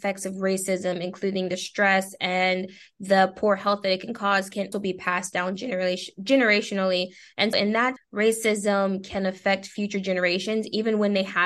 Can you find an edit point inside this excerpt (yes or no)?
yes